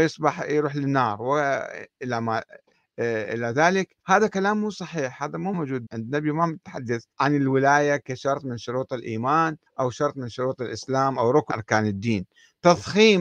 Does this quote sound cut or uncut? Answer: cut